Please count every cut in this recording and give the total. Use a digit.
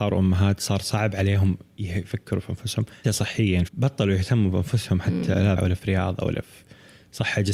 3